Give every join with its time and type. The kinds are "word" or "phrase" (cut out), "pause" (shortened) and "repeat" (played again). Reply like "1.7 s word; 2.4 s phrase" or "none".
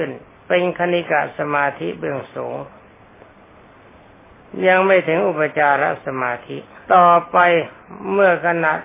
6.8 s pause